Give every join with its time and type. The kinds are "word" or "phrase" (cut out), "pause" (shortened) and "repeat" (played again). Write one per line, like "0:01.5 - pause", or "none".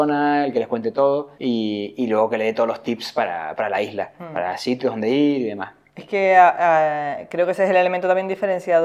0:01.3 - pause

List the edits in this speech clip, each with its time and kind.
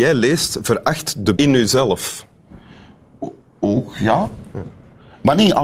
0:01.4 - word

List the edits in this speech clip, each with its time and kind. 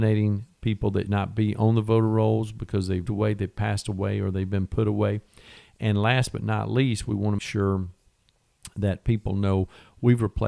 0:01.1 - word
0:03.1 - word
0:07.4 - word

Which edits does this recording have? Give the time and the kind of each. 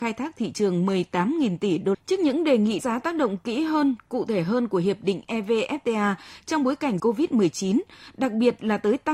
0:01.9 - phrase
0:02.8 - word
0:07.0 - word

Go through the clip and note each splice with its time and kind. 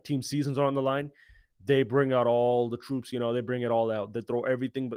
none

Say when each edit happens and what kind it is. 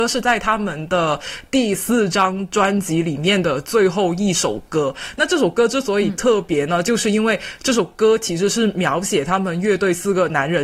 none

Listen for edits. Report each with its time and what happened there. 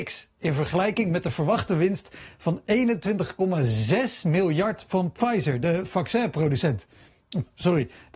none

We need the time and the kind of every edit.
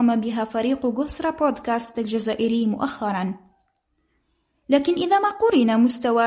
none

